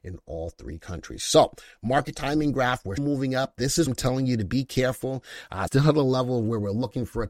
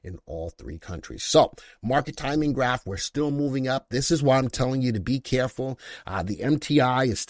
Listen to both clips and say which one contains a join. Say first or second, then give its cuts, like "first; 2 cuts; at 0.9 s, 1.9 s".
first; 3 cuts; at 3.0 s, 3.9 s, 5.7 s